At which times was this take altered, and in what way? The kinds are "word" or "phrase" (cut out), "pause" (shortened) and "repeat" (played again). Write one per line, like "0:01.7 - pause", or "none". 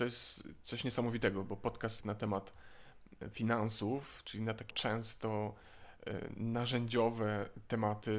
0:02.0 - word
0:04.7 - word